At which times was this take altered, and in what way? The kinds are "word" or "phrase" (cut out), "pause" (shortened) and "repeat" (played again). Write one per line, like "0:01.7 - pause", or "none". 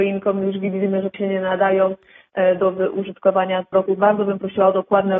0:01.1 - word
0:03.7 - word